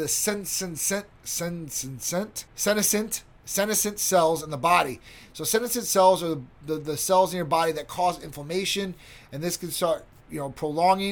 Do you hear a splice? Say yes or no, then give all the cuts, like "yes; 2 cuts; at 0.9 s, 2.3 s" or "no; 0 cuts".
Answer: yes; 1 cut; at 2.5 s